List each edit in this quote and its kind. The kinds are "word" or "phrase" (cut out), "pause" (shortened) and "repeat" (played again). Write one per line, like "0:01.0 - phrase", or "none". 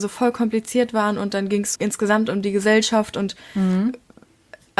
0:01.8 - word